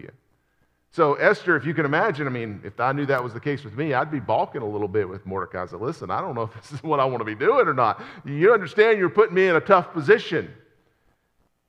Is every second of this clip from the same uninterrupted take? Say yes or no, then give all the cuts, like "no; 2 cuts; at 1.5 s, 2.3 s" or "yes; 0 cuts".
yes; 0 cuts